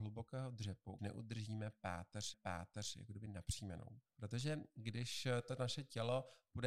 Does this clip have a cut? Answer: yes; 3 cuts; at 1.0 s, 2.3 s, 4.1 s

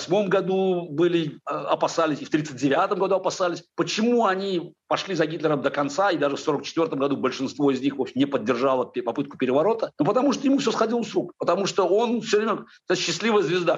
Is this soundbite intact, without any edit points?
yes; 0 cuts

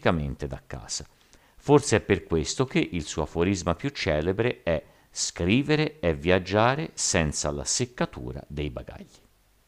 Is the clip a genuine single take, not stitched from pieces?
yes; 0 cuts

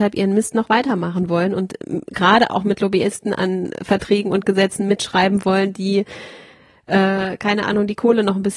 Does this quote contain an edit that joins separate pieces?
no; 0 cuts

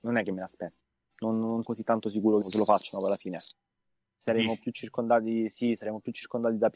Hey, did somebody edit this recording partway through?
yes; 2 cuts; at 1.6 s, 2.4 s

